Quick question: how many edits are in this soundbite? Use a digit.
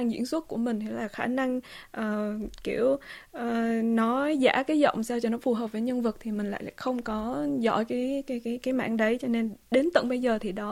0